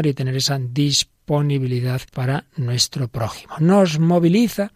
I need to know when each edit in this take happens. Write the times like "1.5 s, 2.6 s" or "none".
2.1 s